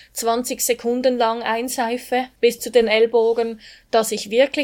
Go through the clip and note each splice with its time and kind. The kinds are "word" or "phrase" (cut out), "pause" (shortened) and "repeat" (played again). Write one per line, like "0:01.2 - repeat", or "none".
0:02.4 - pause